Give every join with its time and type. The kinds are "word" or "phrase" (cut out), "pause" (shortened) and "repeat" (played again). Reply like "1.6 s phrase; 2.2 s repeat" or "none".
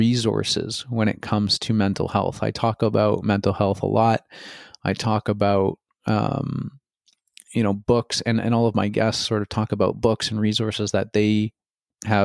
none